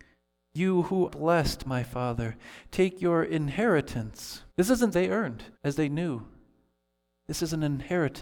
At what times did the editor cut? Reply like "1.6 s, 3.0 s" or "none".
1.1 s, 1.7 s, 4.5 s, 4.9 s, 5.6 s